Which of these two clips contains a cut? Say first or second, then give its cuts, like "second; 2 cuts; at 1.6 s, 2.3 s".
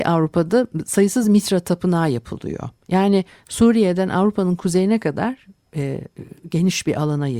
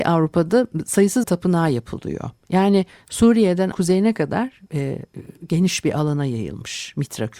second; 3 cuts; at 1.2 s, 3.7 s, 4.7 s